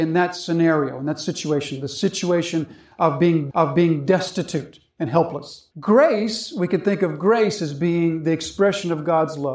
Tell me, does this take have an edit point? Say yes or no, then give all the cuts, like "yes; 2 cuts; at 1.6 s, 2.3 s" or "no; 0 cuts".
yes; 2 cuts; at 3.5 s, 5.7 s